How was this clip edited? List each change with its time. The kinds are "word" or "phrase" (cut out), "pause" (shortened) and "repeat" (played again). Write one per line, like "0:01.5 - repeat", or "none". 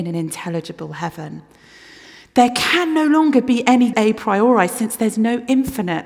0:03.9 - word

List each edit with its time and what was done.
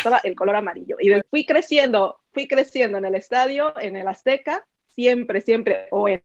0:01.2 - word

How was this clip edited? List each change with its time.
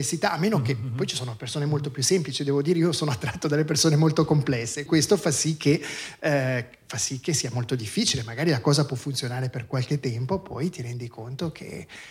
0:04.9 - word

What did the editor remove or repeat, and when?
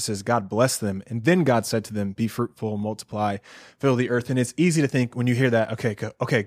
none

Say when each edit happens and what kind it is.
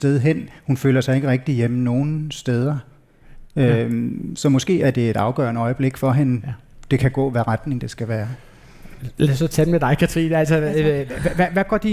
none

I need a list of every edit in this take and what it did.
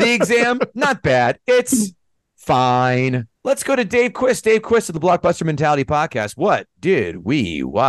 0:03.4 - pause

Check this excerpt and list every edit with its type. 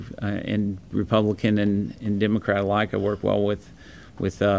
none

